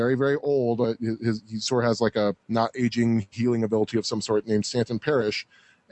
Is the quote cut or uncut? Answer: cut